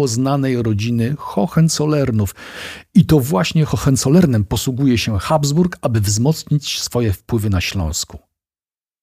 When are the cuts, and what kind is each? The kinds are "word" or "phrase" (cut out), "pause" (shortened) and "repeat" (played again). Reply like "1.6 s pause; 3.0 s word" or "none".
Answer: none

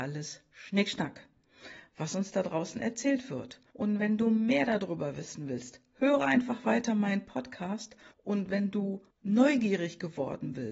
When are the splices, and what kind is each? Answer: 3.7 s pause; 8.1 s pause; 9.1 s pause

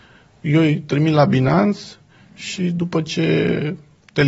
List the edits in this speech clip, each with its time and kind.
none

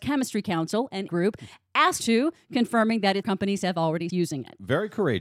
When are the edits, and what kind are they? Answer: 1.1 s word; 2.0 s word; 3.2 s word; 4.1 s word

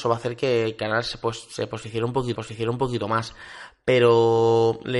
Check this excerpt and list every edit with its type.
2.3 s repeat

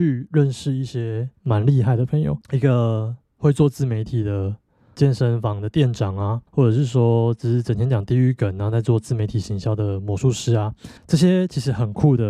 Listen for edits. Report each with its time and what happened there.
1.4 s pause; 2.4 s pause; 5.0 s word; 6.5 s pause; 11.0 s pause

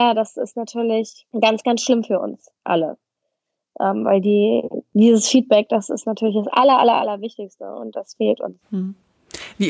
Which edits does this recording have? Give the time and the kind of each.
1.3 s pause; 2.6 s pause; 8.6 s pause

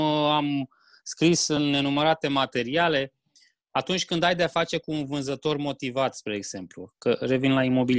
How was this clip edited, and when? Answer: none

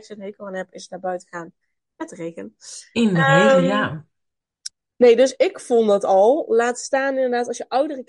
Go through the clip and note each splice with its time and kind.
none

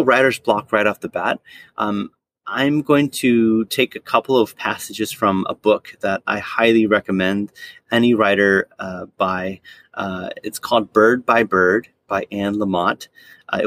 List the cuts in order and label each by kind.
none

